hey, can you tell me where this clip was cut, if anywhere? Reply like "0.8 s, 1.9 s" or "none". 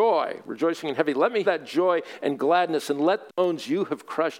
1.4 s, 3.3 s

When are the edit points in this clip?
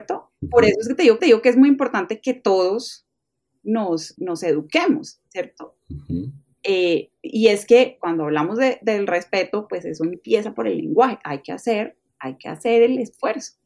1.2 s, 4.2 s, 12.1 s

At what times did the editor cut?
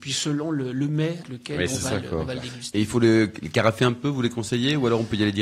1.2 s

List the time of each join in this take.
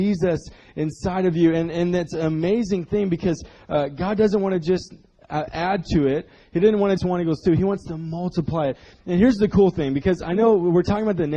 7.0 s

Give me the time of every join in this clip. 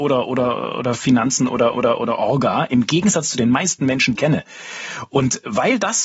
1.7 s, 4.2 s

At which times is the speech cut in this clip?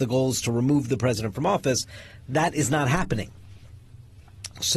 none

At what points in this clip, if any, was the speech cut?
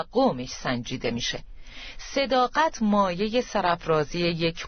none

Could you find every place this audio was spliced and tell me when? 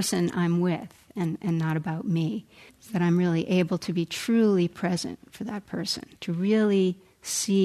2.7 s, 6.1 s

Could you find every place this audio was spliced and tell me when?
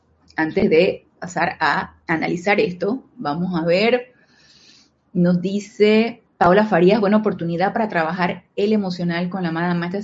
2.0 s, 6.3 s

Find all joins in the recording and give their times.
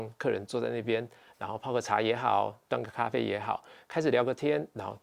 none

